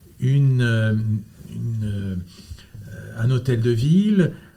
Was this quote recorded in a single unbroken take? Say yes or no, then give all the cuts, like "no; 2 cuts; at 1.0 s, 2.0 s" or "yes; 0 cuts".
yes; 0 cuts